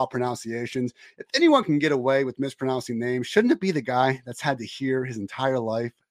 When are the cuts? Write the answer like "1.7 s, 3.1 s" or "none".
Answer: none